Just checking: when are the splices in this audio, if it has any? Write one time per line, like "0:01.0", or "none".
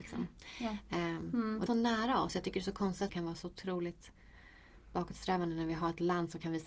0:01.7
0:03.1